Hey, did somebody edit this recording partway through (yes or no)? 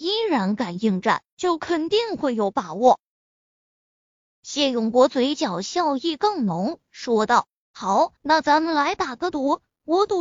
yes